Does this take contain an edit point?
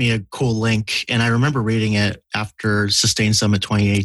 no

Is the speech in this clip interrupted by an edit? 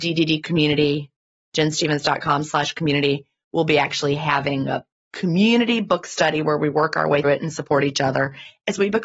yes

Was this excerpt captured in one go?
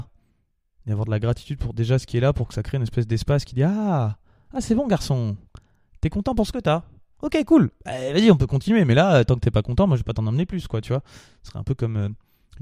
yes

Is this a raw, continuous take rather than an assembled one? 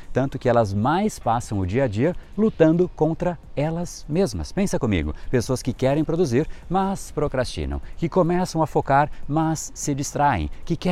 yes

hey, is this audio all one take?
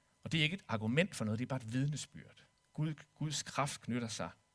no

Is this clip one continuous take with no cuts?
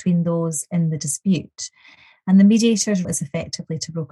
no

